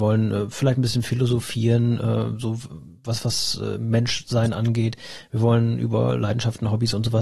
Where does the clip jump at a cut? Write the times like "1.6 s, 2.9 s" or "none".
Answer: none